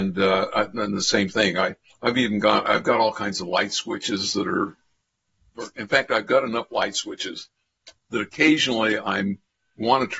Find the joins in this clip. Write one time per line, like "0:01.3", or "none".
0:01.9